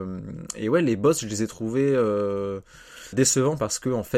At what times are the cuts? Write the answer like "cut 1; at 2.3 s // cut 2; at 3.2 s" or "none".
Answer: cut 1; at 3.1 s